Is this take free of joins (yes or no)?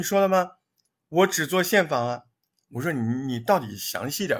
yes